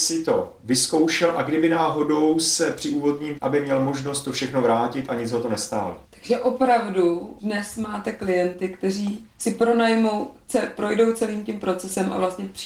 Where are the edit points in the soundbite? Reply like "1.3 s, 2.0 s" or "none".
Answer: 3.4 s, 6.0 s, 7.4 s, 9.3 s